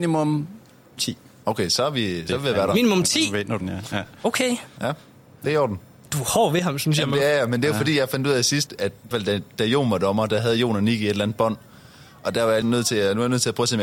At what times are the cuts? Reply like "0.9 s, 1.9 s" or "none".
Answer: 1.0 s, 3.6 s, 8.7 s, 9.1 s, 12.6 s